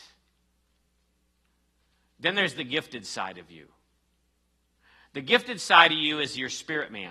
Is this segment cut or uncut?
uncut